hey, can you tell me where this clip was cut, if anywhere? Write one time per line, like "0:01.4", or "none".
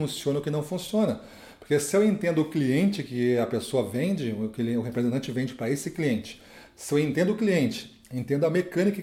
none